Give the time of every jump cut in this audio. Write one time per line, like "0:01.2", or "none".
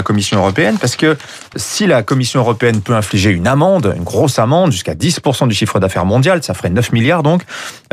0:01.5